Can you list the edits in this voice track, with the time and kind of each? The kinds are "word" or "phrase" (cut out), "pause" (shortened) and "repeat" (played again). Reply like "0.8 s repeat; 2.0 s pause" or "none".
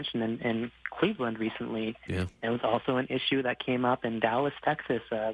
none